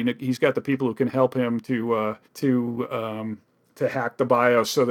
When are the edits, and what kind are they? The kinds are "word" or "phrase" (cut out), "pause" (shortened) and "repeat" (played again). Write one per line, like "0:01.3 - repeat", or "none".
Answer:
0:02.2 - pause
0:03.6 - pause